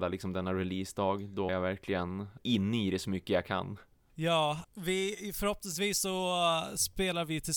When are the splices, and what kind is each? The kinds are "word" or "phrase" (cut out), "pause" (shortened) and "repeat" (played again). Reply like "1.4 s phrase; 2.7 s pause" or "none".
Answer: 1.5 s word; 2.4 s word; 4.6 s word